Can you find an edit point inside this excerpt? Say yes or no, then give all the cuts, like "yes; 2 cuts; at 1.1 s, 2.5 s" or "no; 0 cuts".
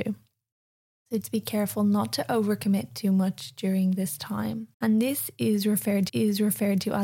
yes; 3 cuts; at 1.2 s, 4.7 s, 6.1 s